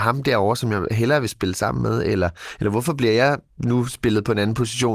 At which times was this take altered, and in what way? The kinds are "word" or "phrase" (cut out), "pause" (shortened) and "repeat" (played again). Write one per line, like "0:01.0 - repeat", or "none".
0:03.5 - pause